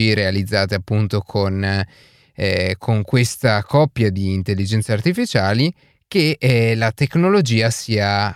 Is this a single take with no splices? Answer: yes; 0 cuts

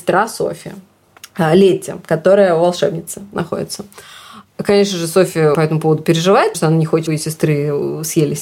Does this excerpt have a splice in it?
yes; 3 cuts; at 5.5 s, 6.5 s, 7.1 s

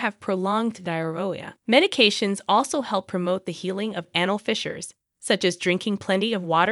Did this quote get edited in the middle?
yes; 1 cut; at 1.6 s

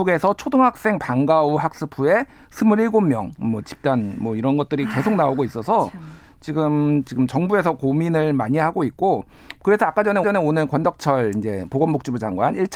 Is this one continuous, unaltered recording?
no; 1 cut; at 10.2 s

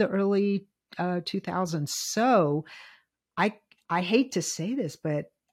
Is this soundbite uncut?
yes; 0 cuts

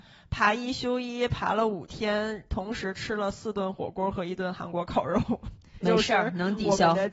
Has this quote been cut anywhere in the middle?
yes; 1 cut; at 5.8 s

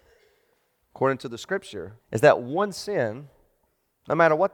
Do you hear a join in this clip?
yes; 1 cut; at 2.0 s

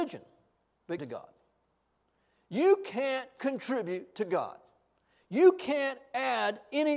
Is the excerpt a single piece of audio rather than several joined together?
no; 1 cut; at 1.0 s

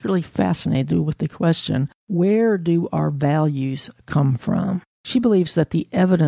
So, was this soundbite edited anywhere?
no; 0 cuts

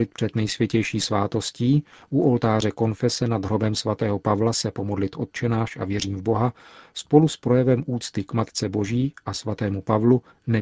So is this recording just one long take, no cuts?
yes; 0 cuts

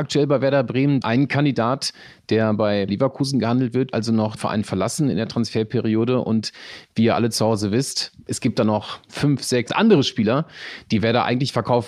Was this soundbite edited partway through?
yes; 6 cuts; at 1.0 s, 2.9 s, 3.9 s, 4.4 s, 8.2 s, 9.7 s

